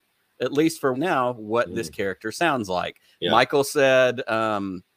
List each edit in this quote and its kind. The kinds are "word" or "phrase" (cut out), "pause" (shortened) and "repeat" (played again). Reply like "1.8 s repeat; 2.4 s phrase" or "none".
0.9 s phrase

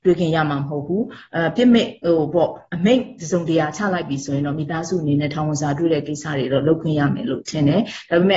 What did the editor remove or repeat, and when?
2.7 s pause

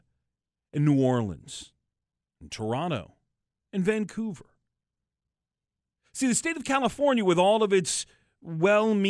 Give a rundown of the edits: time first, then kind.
none

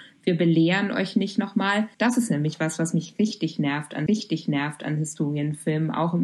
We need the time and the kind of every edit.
1.9 s pause; 4.1 s repeat

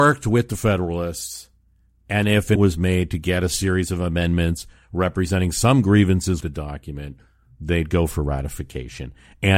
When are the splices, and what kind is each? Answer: 2.6 s word; 6.4 s word

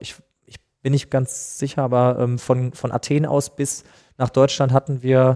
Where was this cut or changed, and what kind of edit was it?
none

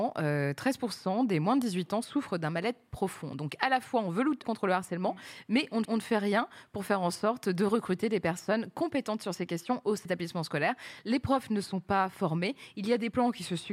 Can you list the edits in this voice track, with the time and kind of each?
4.4 s phrase; 5.8 s repeat; 10.1 s word

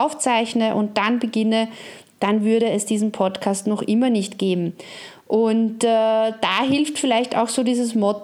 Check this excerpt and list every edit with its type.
none

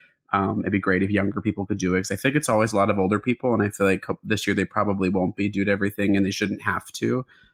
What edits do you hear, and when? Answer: none

